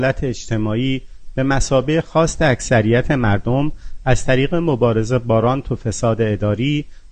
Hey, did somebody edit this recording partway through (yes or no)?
no